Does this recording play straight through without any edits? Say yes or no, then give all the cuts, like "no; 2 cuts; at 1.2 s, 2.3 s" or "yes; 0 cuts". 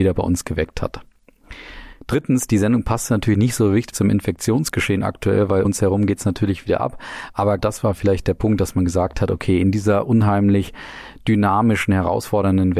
no; 3 cuts; at 3.9 s, 5.6 s, 7.6 s